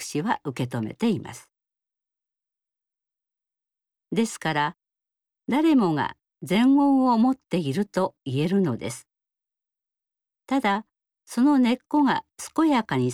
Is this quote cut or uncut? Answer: uncut